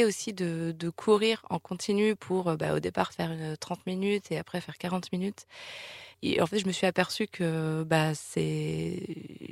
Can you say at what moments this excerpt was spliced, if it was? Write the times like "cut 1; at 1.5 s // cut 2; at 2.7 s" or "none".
none